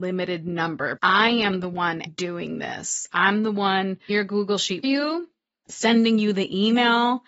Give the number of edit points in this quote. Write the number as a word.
four